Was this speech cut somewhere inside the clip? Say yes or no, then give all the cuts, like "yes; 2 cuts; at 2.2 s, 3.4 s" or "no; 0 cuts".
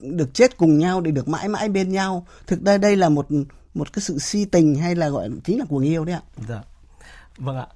no; 0 cuts